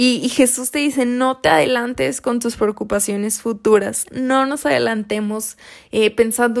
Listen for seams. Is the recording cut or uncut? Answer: uncut